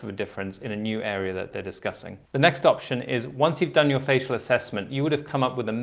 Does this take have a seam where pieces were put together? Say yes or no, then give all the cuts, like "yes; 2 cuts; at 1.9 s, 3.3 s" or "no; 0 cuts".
yes; 1 cut; at 2.3 s